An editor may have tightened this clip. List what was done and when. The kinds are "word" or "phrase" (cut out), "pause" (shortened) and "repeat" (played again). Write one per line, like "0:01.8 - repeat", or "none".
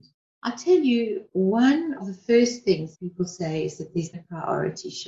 0:02.0 - word
0:02.9 - word
0:04.1 - word